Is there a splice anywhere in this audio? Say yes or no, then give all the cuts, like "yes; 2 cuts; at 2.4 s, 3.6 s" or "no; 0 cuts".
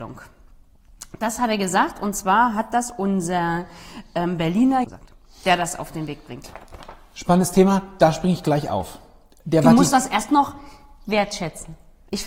yes; 1 cut; at 4.8 s